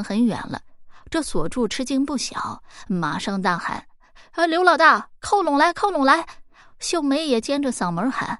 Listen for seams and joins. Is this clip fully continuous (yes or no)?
no